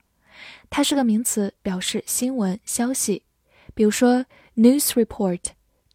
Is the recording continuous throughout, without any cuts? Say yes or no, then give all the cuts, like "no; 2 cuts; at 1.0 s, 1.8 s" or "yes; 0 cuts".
yes; 0 cuts